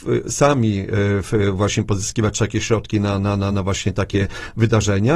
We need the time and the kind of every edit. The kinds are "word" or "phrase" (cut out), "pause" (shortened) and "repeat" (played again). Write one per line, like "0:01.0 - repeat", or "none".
none